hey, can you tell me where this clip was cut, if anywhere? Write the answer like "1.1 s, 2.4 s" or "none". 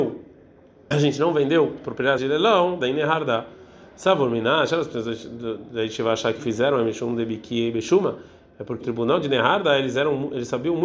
0.9 s, 2.2 s, 2.8 s, 6.4 s, 8.8 s